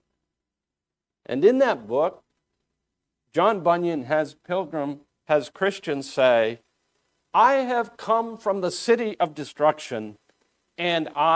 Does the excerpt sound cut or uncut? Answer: cut